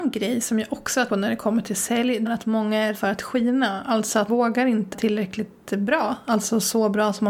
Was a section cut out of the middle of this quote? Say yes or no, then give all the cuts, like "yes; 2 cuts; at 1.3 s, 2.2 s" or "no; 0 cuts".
yes; 5 cuts; at 1.1 s, 2.3 s, 2.9 s, 4.3 s, 4.9 s